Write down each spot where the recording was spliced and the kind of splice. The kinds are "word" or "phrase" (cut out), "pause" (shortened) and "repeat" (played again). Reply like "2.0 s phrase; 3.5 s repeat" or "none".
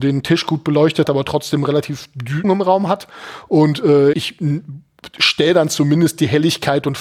1.0 s word; 2.4 s phrase; 4.1 s word